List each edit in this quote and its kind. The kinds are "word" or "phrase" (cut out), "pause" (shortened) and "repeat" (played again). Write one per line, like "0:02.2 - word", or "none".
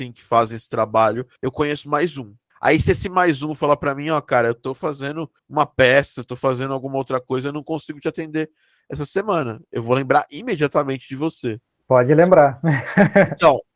0:01.4 - pause
0:02.5 - pause
0:05.4 - pause
0:11.8 - pause